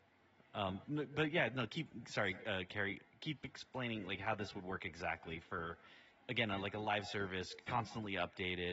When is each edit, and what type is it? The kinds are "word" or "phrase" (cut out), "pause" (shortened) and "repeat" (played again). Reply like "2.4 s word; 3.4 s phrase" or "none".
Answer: none